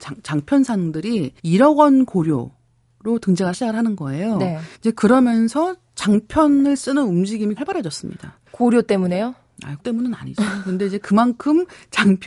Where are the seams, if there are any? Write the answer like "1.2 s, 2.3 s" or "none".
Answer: 1.4 s, 3.5 s, 4.7 s, 7.6 s, 8.5 s, 9.8 s